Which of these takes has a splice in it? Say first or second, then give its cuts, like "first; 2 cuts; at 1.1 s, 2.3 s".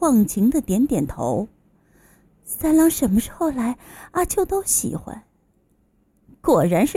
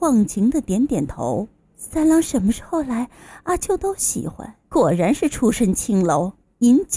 second; 2 cuts; at 1.6 s, 4.6 s